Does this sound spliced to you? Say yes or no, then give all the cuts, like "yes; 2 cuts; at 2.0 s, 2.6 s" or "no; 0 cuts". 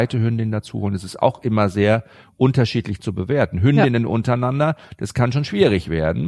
no; 0 cuts